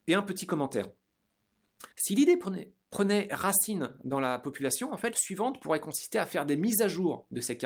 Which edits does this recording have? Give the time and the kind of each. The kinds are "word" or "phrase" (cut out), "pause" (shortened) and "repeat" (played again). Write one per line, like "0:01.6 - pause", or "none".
0:01.9 - pause
0:05.1 - word